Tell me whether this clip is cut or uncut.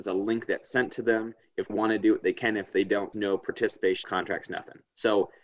cut